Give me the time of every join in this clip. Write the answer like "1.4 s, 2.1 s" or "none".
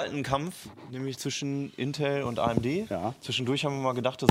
none